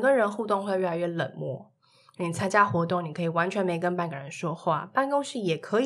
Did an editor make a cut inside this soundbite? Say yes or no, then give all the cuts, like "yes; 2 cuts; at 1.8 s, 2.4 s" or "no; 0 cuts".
no; 0 cuts